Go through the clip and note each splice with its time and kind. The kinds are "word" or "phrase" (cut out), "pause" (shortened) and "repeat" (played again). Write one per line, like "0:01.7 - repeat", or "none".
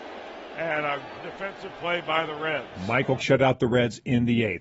0:01.2 - word
0:03.2 - word